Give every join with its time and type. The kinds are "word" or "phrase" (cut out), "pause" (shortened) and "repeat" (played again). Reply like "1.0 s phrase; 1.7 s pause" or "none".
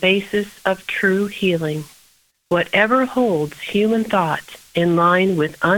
2.3 s pause